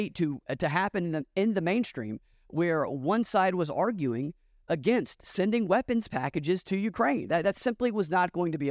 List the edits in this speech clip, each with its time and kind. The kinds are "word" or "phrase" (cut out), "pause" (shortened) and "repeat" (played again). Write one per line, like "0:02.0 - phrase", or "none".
none